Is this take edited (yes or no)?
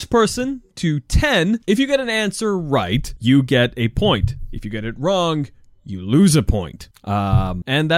no